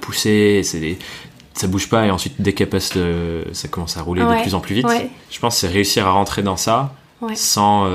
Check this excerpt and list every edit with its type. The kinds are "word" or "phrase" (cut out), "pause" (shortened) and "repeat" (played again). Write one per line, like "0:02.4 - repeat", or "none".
0:05.2 - pause